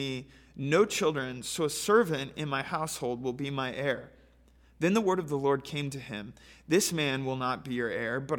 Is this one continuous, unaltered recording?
yes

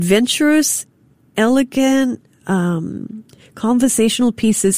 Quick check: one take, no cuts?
yes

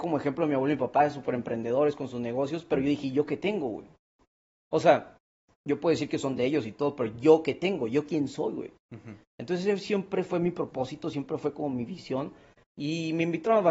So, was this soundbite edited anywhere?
no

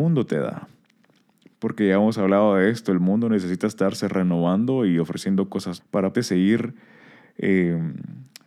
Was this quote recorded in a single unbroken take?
no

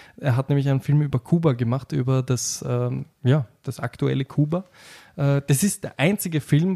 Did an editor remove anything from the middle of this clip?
no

